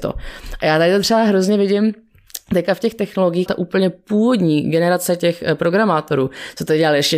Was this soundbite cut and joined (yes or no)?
yes